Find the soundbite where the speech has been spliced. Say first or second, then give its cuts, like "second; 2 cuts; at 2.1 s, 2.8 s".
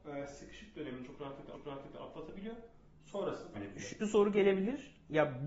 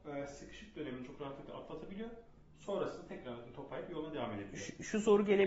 first; 3 cuts; at 1.5 s, 3.5 s, 4.0 s